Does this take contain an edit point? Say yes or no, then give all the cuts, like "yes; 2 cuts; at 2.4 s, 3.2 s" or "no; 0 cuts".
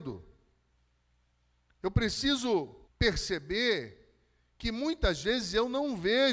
yes; 1 cut; at 2.9 s